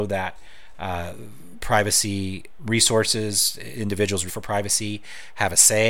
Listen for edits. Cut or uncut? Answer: cut